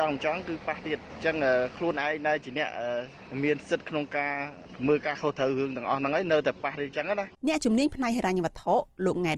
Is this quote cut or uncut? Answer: cut